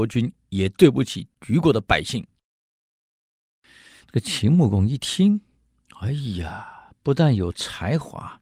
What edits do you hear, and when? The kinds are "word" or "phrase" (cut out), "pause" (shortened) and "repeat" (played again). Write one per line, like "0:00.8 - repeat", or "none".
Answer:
0:01.4 - pause